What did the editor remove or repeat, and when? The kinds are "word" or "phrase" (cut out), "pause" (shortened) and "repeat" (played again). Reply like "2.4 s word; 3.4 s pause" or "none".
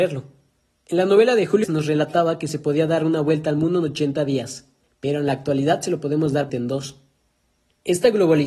1.6 s word; 4.8 s pause; 6.5 s word